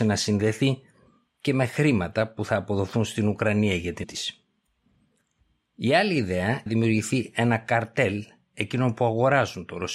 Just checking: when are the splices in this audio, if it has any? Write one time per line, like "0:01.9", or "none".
0:04.0
0:06.7